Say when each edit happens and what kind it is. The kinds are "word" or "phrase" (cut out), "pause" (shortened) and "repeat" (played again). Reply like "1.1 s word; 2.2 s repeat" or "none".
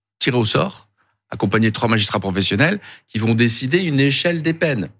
none